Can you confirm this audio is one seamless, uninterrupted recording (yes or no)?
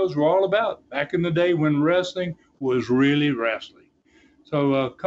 yes